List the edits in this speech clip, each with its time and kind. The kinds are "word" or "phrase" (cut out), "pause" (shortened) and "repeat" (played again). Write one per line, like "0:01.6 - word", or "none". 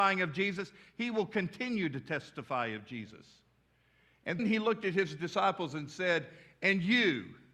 0:04.4 - word